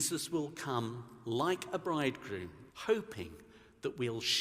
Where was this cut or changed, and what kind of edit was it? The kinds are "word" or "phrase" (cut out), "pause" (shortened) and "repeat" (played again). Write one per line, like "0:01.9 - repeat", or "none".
0:02.7 - pause